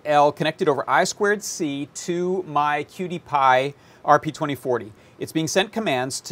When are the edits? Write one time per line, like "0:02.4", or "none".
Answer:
none